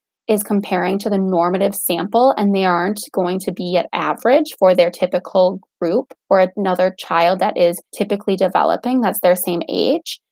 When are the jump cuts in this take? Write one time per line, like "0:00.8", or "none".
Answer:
0:06.2
0:07.9

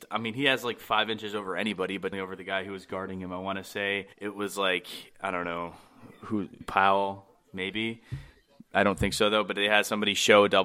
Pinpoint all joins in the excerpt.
0:02.1
0:04.1
0:06.6

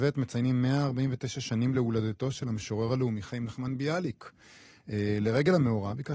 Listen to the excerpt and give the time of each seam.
none

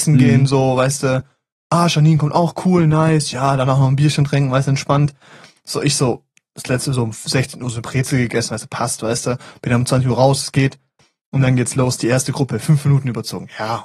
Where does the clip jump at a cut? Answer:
none

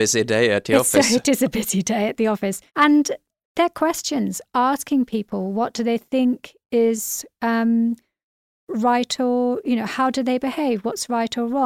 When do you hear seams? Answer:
0:02.7

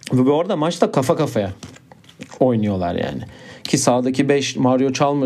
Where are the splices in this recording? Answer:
none

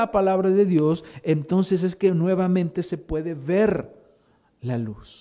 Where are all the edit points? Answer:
none

